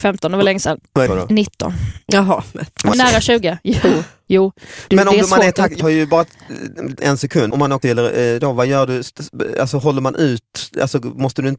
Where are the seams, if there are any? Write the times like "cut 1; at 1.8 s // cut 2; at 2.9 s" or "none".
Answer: cut 1; at 1.1 s // cut 2; at 2.9 s // cut 3; at 5.8 s // cut 4; at 7.0 s // cut 5; at 7.5 s // cut 6; at 7.8 s